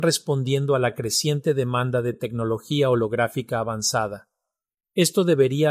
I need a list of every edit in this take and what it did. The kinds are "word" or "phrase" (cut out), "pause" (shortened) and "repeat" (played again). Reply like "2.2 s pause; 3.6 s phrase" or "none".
none